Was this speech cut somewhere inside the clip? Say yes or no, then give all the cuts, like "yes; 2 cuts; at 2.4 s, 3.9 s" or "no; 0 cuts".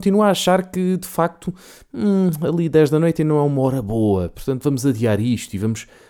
no; 0 cuts